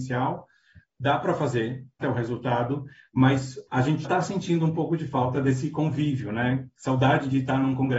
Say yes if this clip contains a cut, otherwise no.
yes